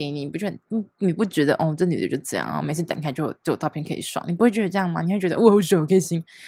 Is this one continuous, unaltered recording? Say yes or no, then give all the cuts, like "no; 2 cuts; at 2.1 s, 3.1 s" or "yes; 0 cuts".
yes; 0 cuts